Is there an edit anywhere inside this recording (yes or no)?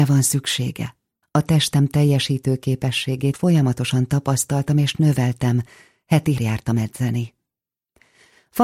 yes